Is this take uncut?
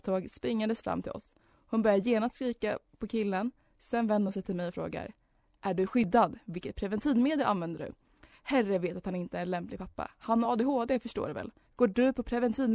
yes; 0 cuts

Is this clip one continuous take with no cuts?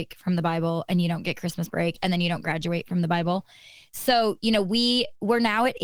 yes; 0 cuts

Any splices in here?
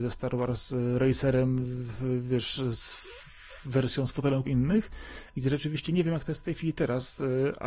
yes; 1 cut; at 4.5 s

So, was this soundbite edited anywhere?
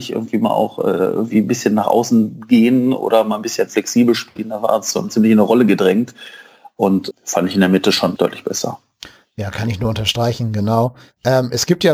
yes; 3 cuts; at 5.1 s, 7.1 s, 8.2 s

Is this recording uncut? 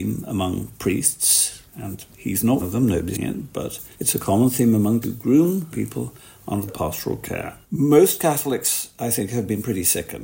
no; 8 cuts; at 1.7 s, 2.6 s, 3.1 s, 3.9 s, 5.0 s, 5.7 s, 6.7 s, 7.6 s

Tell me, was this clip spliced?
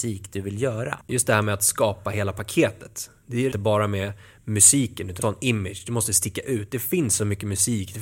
yes; 3 cuts; at 1.0 s, 3.5 s, 5.2 s

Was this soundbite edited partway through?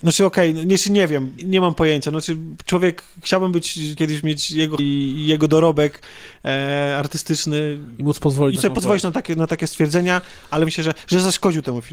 yes; 5 cuts; at 1.4 s, 4.0 s, 4.8 s, 8.6 s, 10.7 s

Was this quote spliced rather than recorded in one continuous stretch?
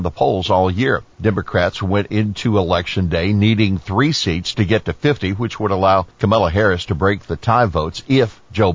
yes; 2 cuts; at 1.1 s, 6.1 s

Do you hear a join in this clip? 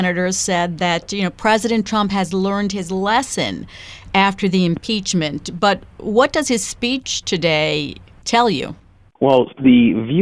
no; 0 cuts

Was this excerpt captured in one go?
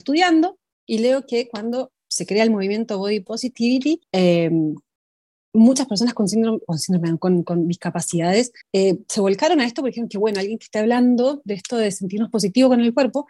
no; 2 cuts; at 4.0 s, 8.6 s

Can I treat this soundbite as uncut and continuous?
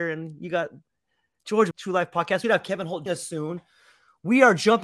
no; 3 cuts; at 1.7 s, 2.4 s, 3.1 s

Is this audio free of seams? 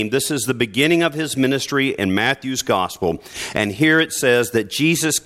yes; 0 cuts

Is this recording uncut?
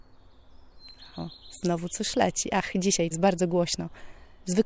no; 1 cut; at 3.1 s

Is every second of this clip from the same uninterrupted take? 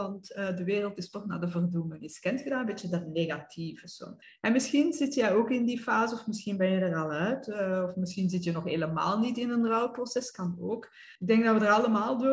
no; 2 cuts; at 4.2 s, 11.1 s

